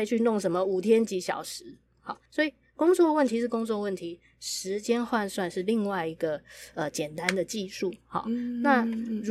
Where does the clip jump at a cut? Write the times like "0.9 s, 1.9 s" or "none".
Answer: 2.3 s